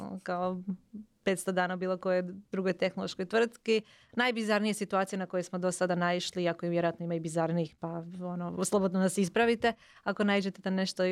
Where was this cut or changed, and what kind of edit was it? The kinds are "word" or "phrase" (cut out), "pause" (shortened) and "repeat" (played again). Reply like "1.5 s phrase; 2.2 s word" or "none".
none